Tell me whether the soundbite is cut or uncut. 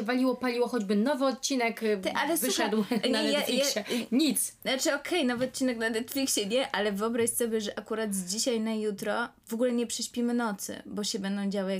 uncut